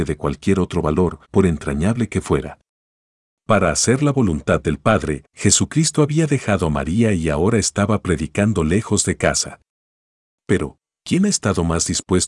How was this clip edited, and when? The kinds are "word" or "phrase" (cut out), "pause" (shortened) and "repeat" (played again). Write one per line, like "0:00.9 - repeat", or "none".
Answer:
0:01.2 - pause
0:05.3 - pause